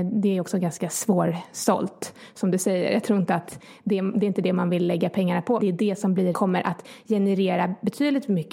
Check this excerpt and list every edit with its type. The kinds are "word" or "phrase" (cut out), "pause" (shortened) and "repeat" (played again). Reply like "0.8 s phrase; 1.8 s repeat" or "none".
5.6 s word; 6.3 s phrase

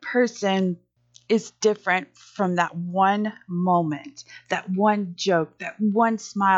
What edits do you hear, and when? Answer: none

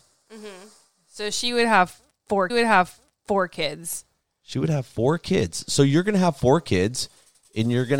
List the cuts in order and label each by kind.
2.5 s repeat

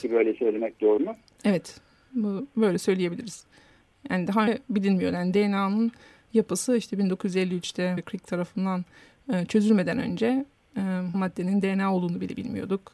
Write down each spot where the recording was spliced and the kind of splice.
1.0 s word; 4.5 s word; 8.0 s word; 11.1 s word

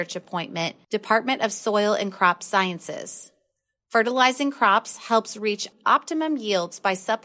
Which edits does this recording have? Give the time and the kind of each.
none

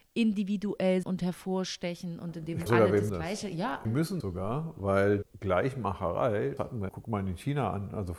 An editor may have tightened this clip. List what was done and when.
1.0 s word; 2.7 s word; 3.1 s word; 3.8 s word; 4.2 s word; 5.2 s word; 6.6 s word; 6.9 s word

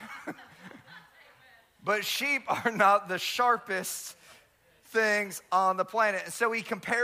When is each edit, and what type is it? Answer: none

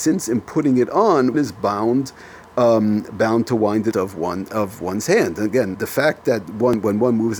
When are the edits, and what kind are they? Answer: 1.3 s word; 3.9 s phrase; 5.7 s word

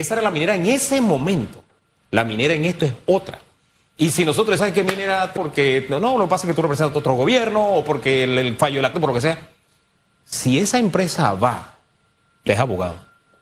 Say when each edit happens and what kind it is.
2.8 s word; 4.6 s word; 5.4 s word; 8.9 s word; 12.5 s word

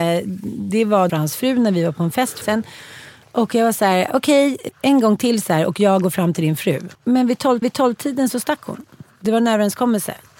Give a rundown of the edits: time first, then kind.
1.1 s phrase; 2.4 s phrase; 4.7 s word; 6.9 s pause; 7.6 s repeat

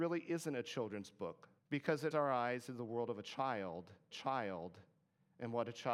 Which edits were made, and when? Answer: 1.6 s pause; 2.1 s word; 2.7 s word; 4.1 s repeat

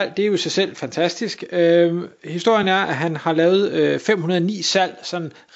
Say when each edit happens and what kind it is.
none

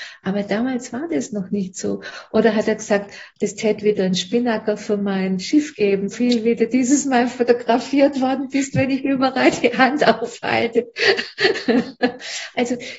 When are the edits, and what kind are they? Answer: 3.4 s word; 6.1 s word

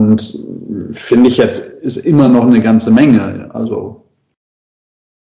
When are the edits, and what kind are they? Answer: none

